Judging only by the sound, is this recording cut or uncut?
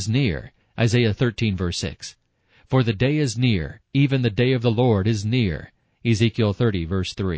uncut